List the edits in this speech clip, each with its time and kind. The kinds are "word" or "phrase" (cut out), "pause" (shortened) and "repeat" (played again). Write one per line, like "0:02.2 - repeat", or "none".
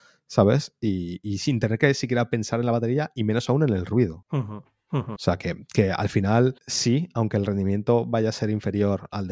0:06.6 - pause